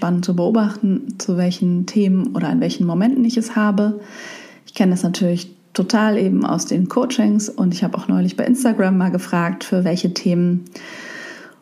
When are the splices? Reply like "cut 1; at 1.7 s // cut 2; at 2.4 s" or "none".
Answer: none